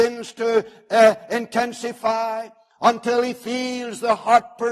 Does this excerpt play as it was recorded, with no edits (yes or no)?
yes